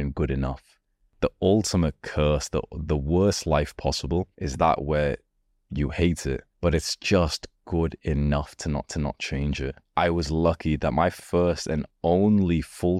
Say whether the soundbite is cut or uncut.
cut